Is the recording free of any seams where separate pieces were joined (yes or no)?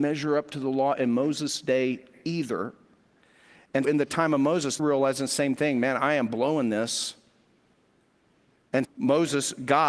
no